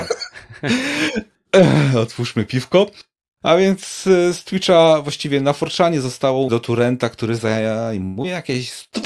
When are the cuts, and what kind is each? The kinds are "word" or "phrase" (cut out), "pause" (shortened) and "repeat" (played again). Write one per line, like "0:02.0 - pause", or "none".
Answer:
0:06.5 - phrase